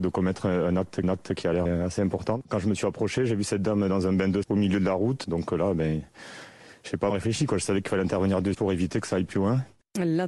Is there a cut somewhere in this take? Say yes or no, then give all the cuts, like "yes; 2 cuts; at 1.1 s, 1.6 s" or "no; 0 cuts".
yes; 5 cuts; at 1.0 s, 1.7 s, 4.4 s, 7.1 s, 8.5 s